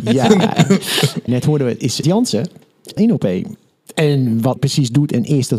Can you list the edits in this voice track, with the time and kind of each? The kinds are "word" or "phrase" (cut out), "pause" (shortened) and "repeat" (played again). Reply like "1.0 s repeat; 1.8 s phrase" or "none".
1.3 s phrase; 2.0 s word; 3.0 s word; 4.6 s word